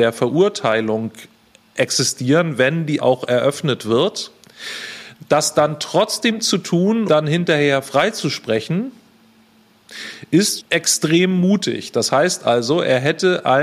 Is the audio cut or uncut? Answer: cut